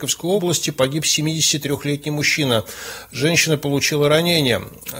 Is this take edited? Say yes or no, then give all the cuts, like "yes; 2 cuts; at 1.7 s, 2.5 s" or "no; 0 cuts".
no; 0 cuts